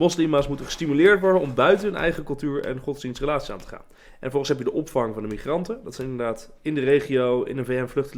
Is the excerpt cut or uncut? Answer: uncut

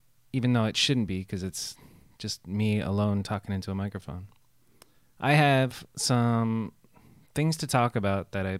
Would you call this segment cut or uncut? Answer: uncut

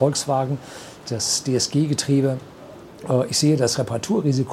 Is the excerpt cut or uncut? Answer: uncut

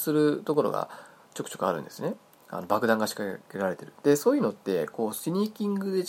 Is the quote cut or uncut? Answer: uncut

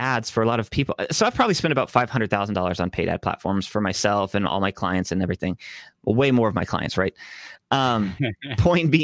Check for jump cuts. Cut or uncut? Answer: uncut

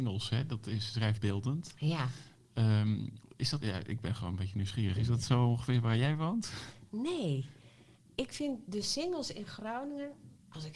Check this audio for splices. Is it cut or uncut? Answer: cut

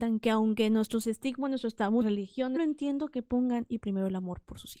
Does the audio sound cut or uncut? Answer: cut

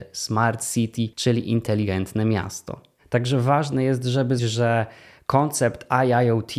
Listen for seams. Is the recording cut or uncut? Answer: cut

